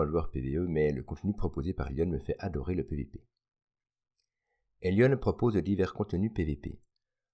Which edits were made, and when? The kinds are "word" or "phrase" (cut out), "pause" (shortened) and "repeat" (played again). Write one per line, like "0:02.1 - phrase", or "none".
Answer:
none